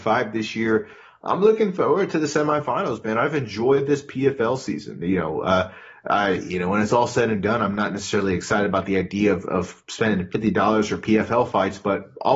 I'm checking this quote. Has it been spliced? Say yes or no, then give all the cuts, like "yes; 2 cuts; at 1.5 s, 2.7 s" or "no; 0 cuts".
no; 0 cuts